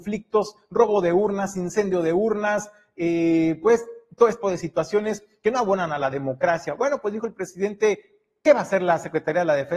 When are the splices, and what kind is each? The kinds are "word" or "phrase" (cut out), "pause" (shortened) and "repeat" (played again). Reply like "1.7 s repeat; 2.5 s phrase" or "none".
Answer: 4.4 s word